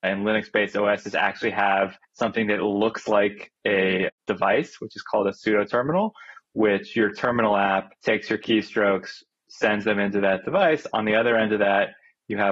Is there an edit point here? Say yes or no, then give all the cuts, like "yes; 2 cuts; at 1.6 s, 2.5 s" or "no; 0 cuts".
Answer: yes; 2 cuts; at 2.0 s, 8.0 s